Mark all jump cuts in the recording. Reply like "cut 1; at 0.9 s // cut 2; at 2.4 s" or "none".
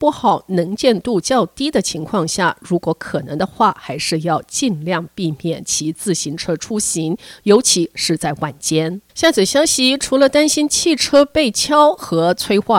cut 1; at 9.1 s